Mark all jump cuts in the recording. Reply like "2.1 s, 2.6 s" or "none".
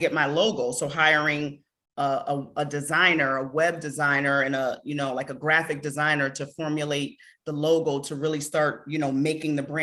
none